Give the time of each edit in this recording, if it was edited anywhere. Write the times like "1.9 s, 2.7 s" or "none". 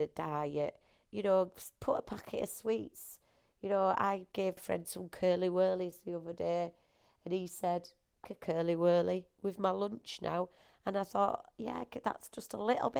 4.6 s, 8.2 s

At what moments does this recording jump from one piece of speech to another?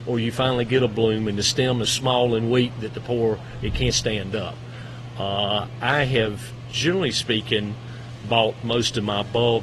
1.8 s, 3.9 s

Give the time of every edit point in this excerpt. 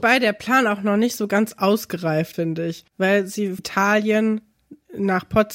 2.3 s, 2.9 s, 3.6 s

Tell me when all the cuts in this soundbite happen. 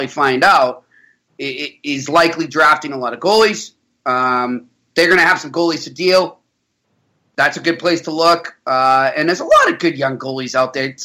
none

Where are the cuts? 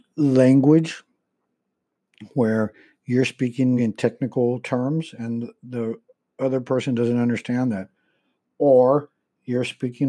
3.8 s

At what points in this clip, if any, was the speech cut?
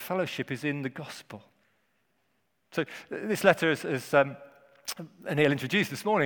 none

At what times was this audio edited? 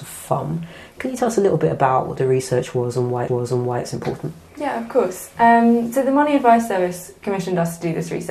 3.3 s

